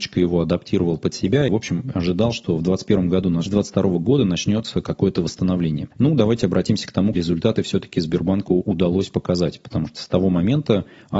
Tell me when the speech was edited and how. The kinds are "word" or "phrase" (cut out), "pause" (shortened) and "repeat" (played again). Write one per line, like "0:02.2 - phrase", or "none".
0:01.5 - word
0:03.5 - phrase
0:07.1 - word